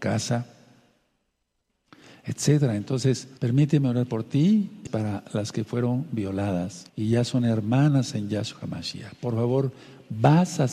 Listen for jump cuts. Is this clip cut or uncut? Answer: cut